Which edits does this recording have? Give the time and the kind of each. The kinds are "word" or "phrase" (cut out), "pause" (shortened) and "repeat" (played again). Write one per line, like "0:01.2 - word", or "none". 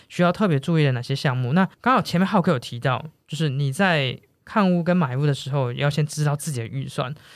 0:01.7 - pause